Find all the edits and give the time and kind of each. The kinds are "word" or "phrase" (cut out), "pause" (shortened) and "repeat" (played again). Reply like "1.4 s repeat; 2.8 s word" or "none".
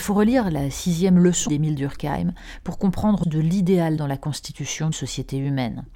1.5 s phrase; 3.2 s word; 4.0 s word; 4.9 s word